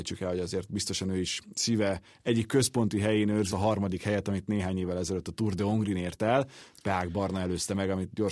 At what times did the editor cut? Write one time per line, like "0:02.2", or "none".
0:03.5

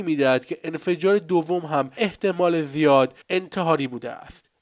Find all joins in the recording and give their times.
0:02.0
0:03.2

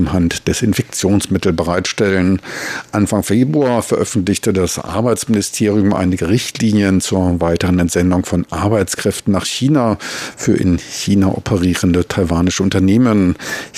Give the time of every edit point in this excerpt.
none

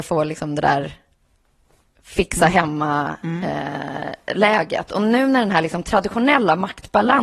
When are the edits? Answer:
none

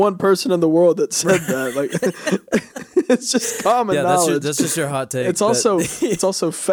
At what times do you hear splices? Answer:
none

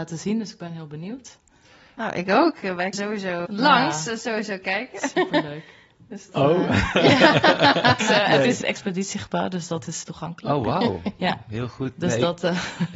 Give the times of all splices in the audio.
0:02.9
0:03.5
0:06.3
0:08.0
0:08.6
0:10.0

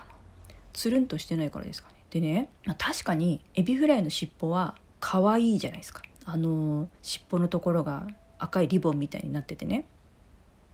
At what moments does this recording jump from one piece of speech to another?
0:02.0
0:02.6
0:03.5
0:04.9
0:06.1
0:06.9

